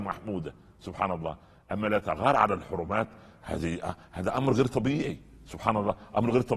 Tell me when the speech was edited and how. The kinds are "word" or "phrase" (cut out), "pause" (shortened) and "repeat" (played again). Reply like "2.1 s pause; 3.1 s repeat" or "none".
none